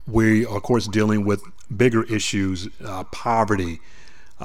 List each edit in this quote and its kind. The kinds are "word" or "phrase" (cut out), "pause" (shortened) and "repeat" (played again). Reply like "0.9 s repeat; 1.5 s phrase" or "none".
none